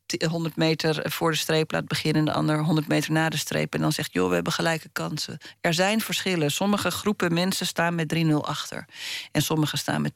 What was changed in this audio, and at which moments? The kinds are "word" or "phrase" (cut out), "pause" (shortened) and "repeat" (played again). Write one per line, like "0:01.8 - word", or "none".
none